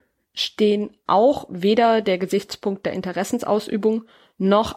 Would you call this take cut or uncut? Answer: cut